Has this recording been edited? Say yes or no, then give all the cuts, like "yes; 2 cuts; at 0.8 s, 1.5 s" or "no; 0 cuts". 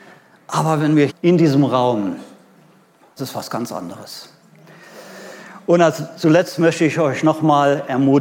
yes; 2 cuts; at 1.1 s, 3.2 s